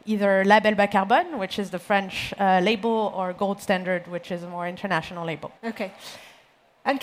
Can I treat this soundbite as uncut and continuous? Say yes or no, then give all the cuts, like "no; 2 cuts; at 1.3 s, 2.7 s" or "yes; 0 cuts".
no; 1 cut; at 5.6 s